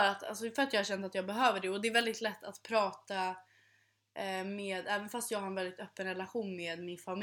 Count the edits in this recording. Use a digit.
0